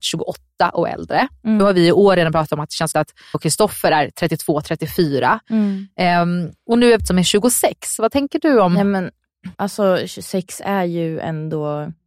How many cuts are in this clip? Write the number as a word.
five